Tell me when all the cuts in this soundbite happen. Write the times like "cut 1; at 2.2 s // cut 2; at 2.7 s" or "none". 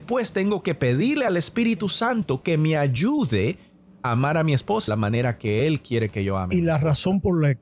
cut 1; at 4.9 s